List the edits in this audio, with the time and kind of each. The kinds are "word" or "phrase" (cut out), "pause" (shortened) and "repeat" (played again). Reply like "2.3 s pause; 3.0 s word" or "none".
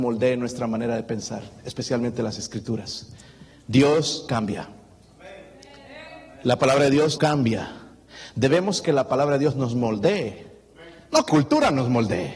4.3 s word; 7.2 s word; 8.8 s word; 11.3 s word